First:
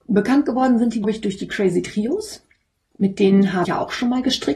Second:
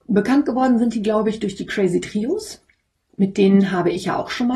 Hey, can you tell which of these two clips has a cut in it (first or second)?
first